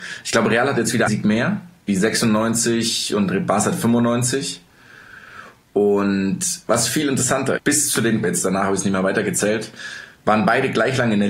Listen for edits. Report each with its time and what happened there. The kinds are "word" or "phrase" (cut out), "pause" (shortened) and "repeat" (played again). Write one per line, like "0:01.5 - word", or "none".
0:01.1 - word
0:01.9 - word
0:07.6 - word
0:08.2 - word